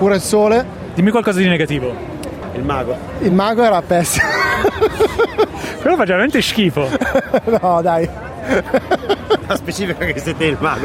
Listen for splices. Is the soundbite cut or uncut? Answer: uncut